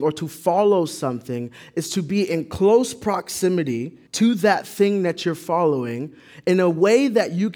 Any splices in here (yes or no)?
yes